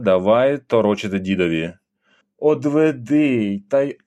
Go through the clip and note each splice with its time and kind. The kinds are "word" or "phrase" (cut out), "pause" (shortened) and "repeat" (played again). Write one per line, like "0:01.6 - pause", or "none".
0:02.2 - pause